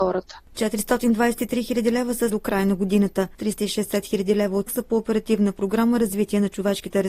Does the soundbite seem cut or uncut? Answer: cut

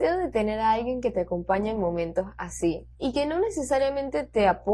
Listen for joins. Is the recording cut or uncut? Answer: cut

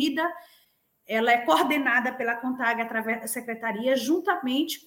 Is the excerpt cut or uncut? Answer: uncut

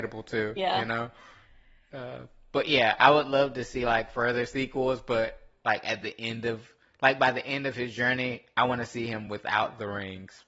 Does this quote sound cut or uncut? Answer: uncut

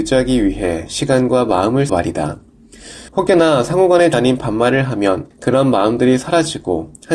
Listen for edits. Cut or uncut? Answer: cut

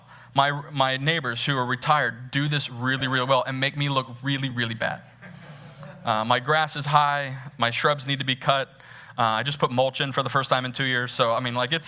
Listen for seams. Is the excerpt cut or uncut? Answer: uncut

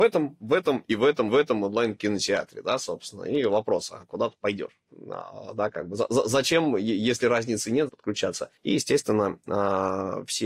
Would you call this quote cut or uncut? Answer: cut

